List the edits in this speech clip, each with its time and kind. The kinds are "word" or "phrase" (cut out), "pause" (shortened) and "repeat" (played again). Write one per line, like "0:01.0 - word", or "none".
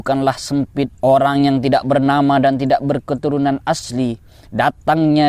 0:00.9 - pause